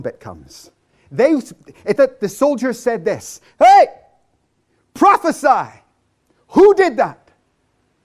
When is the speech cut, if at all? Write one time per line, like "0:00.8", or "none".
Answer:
0:02.0